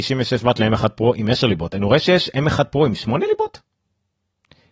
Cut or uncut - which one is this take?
uncut